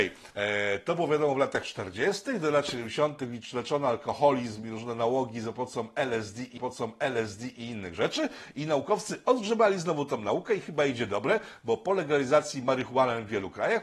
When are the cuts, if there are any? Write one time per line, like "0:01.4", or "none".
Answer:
0:06.6